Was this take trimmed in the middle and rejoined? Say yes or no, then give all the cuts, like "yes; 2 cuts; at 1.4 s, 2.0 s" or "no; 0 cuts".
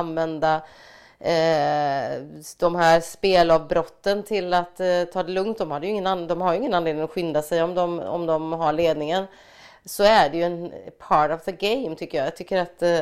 no; 0 cuts